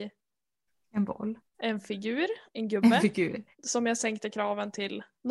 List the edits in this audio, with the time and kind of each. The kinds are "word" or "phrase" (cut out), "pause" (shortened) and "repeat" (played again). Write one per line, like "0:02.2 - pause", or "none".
0:01.5 - pause
0:02.5 - pause
0:03.5 - pause
0:04.0 - word

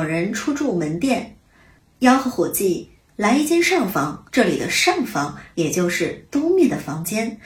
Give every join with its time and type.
0:04.3 - pause

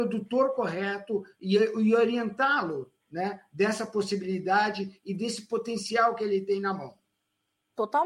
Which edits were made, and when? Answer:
none

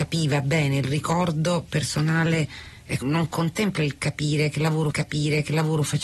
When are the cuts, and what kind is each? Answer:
0:03.0 - word
0:04.9 - repeat

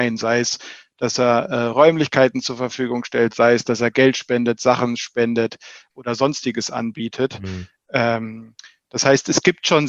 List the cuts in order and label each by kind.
none

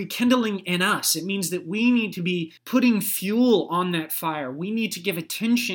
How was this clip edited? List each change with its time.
0:02.6 - pause

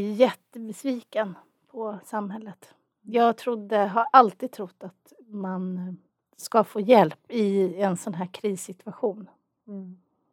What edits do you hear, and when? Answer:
none

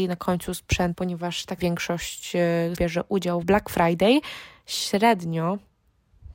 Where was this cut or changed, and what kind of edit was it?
0:00.9 - word
0:01.6 - word
0:02.7 - word
0:03.4 - phrase

